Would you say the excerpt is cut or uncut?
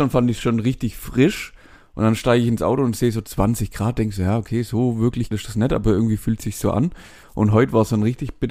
cut